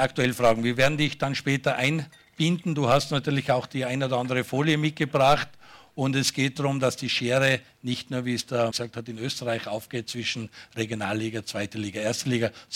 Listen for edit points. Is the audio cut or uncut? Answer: cut